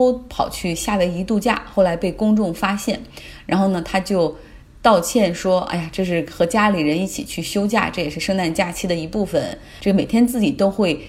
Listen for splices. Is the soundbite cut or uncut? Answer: uncut